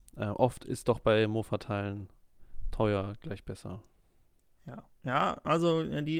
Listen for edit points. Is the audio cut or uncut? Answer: uncut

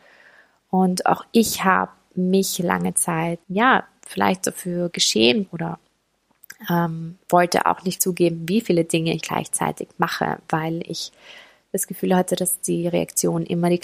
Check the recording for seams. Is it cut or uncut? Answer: cut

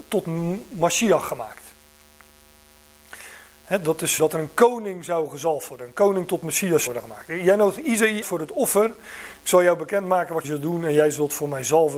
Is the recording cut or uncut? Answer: cut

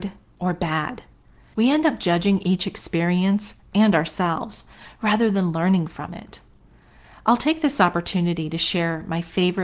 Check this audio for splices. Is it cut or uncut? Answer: uncut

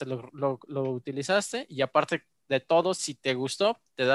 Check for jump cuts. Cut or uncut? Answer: uncut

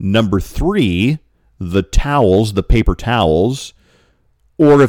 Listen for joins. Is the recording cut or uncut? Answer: uncut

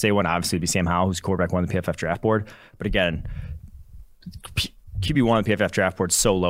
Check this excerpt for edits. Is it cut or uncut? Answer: uncut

